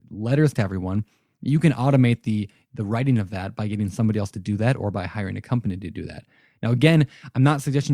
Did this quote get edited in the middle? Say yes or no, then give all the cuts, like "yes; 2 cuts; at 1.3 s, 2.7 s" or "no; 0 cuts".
no; 0 cuts